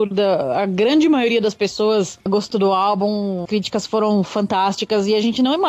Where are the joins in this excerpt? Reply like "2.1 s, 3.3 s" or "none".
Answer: 2.5 s, 3.5 s